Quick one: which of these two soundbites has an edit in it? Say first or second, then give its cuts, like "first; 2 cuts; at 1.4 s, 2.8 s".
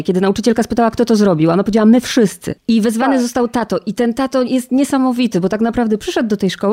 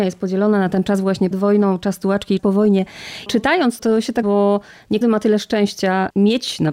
second; 5 cuts; at 1.3 s, 2.4 s, 3.8 s, 4.2 s, 5.0 s